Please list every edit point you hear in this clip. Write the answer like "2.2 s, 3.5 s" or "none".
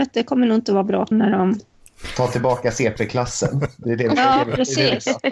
1.1 s